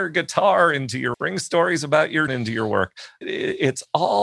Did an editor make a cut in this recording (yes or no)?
yes